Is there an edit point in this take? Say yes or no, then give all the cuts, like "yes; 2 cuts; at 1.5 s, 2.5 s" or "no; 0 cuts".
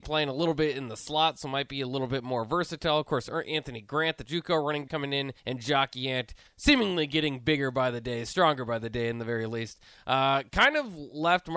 yes; 3 cuts; at 4.3 s, 4.9 s, 5.4 s